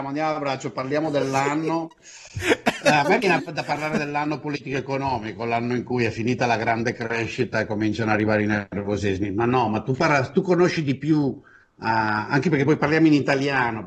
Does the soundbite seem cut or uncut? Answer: uncut